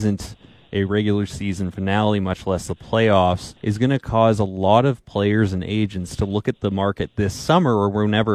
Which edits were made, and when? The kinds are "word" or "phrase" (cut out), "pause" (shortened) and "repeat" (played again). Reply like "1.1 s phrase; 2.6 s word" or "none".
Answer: 3.6 s pause